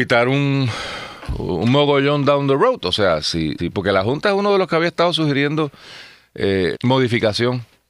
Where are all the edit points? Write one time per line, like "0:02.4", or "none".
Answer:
0:03.6
0:06.7